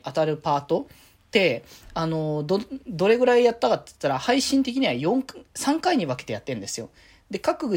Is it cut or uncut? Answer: uncut